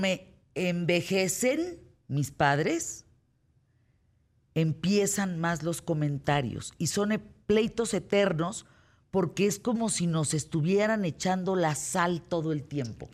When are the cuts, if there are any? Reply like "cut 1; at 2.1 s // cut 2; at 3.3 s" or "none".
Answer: none